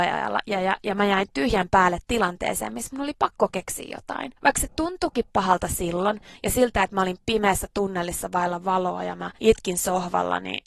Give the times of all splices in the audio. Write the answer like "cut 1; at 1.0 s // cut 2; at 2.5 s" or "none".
cut 1; at 4.4 s // cut 2; at 9.4 s